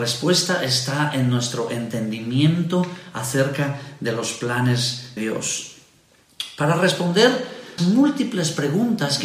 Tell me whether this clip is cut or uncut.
cut